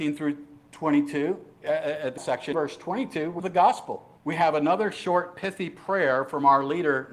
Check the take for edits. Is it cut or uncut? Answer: cut